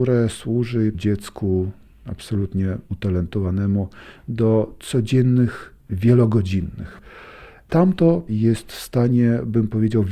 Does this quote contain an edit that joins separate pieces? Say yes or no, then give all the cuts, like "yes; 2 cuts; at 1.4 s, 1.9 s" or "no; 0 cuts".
yes; 4 cuts; at 0.9 s, 2.9 s, 5.9 s, 8.3 s